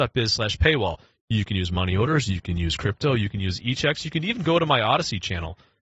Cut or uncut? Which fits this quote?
uncut